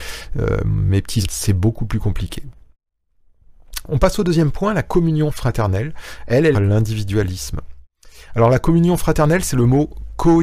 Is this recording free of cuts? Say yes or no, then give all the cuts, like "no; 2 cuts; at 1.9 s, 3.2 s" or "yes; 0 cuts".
no; 2 cuts; at 1.2 s, 6.5 s